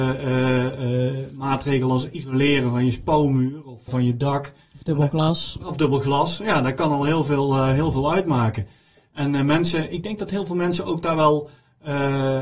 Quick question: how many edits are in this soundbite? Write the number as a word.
one